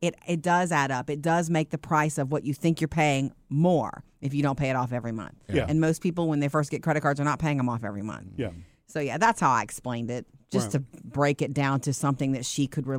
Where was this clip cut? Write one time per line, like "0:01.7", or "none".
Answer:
none